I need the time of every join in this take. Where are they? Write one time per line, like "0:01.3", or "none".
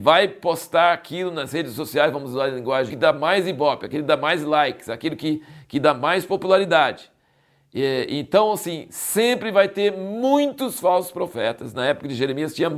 0:02.9